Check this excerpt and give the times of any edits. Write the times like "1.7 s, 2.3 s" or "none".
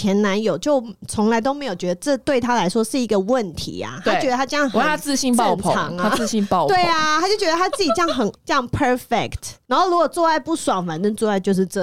8.3 s